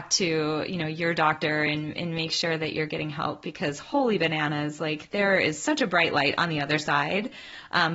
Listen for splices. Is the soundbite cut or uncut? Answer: uncut